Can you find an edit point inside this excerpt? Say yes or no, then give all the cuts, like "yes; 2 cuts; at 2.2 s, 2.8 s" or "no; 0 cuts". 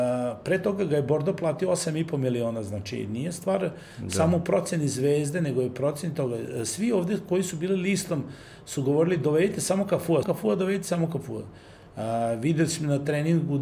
yes; 1 cut; at 10.2 s